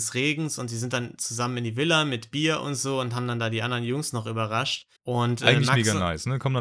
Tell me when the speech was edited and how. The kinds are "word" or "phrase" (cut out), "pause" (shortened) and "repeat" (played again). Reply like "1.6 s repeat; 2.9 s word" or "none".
5.0 s pause